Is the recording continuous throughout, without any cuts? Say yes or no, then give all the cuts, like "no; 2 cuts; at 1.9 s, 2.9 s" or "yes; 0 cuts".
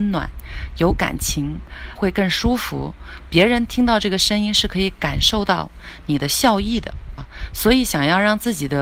no; 2 cuts; at 1.9 s, 7.2 s